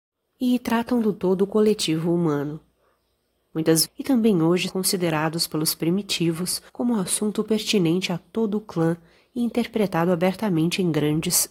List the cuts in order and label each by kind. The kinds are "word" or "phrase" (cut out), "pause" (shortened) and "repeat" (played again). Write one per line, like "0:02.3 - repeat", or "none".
0:03.8 - phrase
0:04.7 - word
0:06.7 - pause